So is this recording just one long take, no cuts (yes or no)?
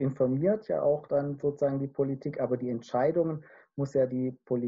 yes